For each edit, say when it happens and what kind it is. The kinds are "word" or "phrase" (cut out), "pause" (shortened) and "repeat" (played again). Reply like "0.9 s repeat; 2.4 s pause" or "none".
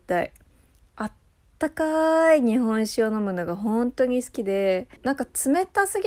5.0 s pause